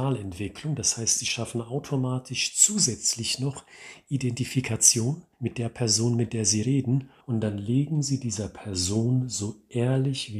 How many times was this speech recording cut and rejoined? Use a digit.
2